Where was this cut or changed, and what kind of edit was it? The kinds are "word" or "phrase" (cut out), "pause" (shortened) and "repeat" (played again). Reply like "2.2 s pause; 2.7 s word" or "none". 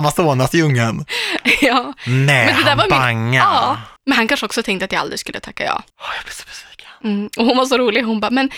4.0 s pause; 5.9 s pause